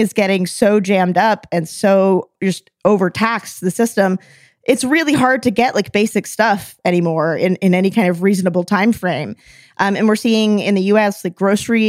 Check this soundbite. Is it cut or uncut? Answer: uncut